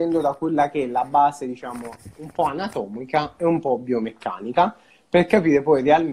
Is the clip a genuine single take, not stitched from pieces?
yes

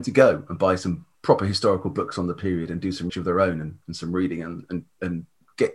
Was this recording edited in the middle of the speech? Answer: yes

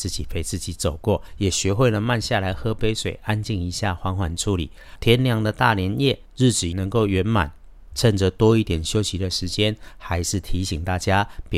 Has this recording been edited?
yes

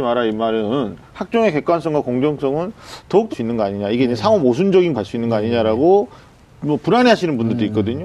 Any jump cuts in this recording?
yes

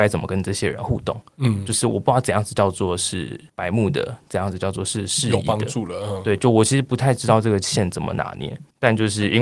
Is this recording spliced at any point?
yes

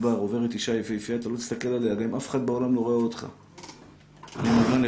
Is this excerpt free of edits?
yes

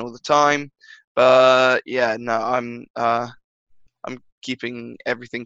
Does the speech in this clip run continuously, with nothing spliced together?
yes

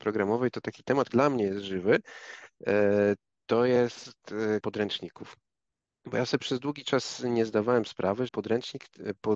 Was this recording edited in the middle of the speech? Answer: yes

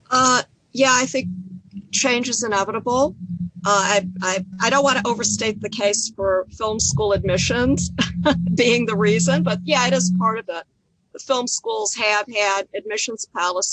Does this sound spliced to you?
no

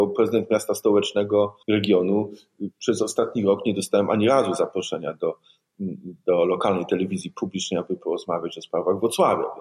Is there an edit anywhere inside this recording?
yes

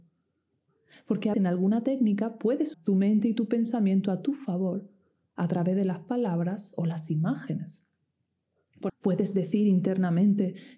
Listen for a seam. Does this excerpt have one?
yes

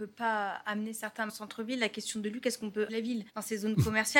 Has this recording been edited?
yes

